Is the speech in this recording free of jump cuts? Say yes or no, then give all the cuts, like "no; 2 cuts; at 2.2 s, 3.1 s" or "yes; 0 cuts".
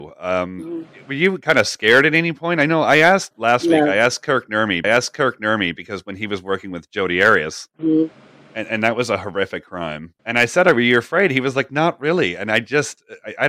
no; 4 cuts; at 3.3 s, 4.8 s, 7.7 s, 10.2 s